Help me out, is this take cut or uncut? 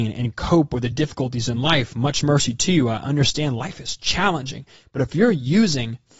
uncut